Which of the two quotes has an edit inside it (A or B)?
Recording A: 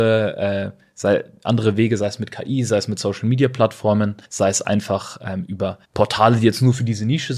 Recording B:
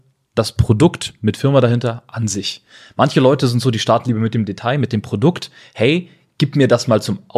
A